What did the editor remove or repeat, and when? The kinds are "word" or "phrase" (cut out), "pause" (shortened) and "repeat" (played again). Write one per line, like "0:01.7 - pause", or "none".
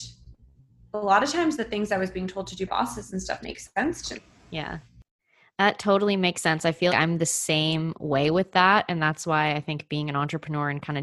0:02.7 - word
0:03.4 - word
0:04.2 - word
0:06.9 - word